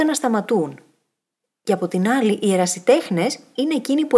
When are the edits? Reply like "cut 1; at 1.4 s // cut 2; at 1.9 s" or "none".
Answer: none